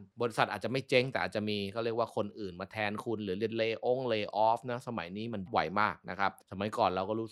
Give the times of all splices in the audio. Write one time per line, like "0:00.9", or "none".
0:05.5